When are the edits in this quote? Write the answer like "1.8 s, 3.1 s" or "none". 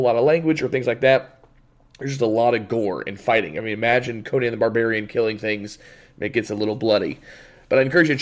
none